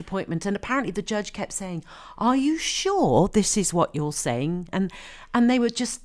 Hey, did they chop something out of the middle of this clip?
no; 0 cuts

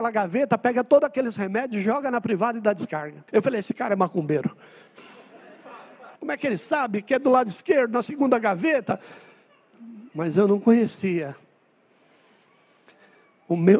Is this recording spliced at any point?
yes; 2 cuts; at 3.3 s, 6.2 s

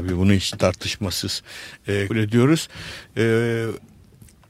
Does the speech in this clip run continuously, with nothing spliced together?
no; 1 cut; at 2.1 s

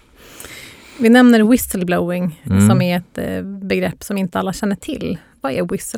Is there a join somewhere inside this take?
no; 0 cuts

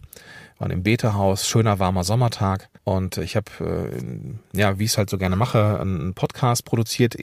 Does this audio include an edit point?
yes; 1 cut; at 2.8 s

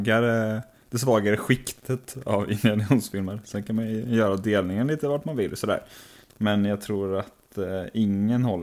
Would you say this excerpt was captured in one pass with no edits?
no; 1 cut; at 6.2 s

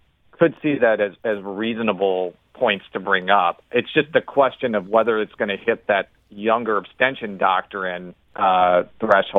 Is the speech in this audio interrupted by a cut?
yes; 2 cuts; at 6.2 s, 8.2 s

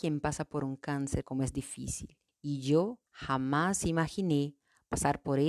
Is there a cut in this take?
yes; 3 cuts; at 1.2 s, 2.3 s, 3.1 s

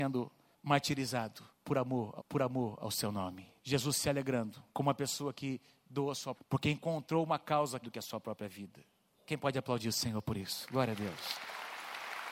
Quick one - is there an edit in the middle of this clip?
yes; 5 cuts; at 2.2 s, 3.6 s, 4.7 s, 6.3 s, 7.8 s

